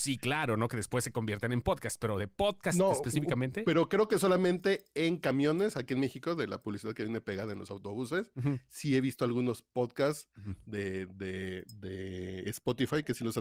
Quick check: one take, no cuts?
yes; 0 cuts

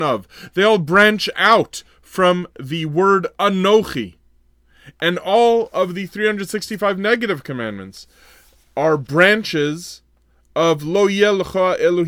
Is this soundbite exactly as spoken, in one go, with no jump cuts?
yes; 0 cuts

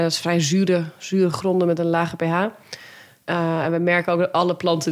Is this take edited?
no; 0 cuts

